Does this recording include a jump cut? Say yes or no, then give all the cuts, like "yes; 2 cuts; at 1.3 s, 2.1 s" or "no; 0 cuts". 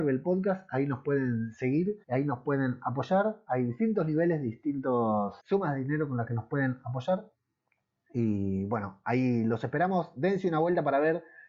yes; 2 cuts; at 2.0 s, 5.4 s